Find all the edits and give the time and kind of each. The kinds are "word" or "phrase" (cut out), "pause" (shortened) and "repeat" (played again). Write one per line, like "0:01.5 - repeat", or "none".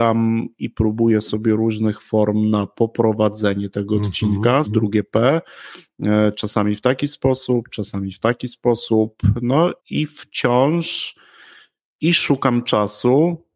0:04.6 - word
0:09.8 - pause

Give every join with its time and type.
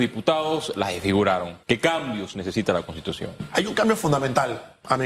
0:01.6 - pause

